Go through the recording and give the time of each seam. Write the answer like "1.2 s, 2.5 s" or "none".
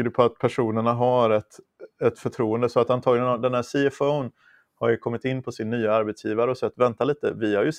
none